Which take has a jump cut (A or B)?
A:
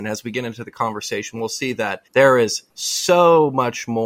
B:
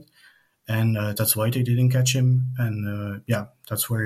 A